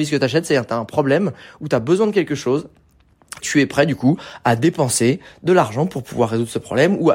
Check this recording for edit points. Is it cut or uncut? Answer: cut